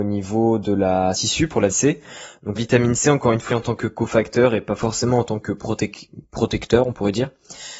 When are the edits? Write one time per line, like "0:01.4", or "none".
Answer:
0:01.1
0:01.7
0:02.6
0:03.5